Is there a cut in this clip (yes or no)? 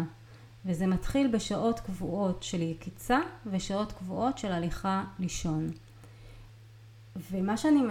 no